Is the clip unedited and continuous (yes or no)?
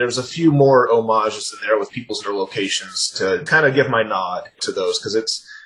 no